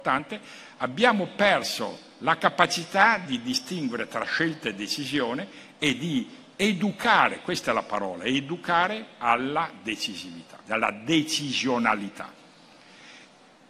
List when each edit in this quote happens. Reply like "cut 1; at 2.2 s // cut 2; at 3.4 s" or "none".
cut 1; at 10.6 s